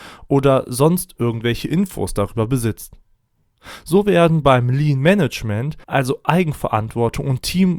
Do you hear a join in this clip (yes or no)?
yes